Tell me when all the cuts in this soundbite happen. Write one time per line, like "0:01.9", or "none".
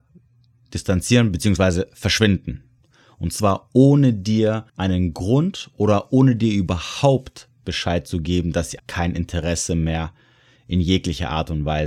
0:04.7
0:08.8